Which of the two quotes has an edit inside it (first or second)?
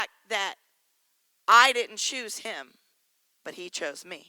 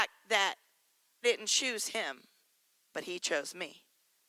second